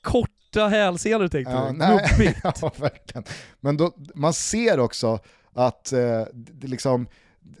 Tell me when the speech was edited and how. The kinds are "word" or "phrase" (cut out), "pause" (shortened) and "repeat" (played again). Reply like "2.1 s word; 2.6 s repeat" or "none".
none